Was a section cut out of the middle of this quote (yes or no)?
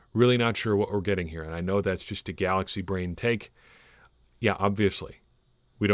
no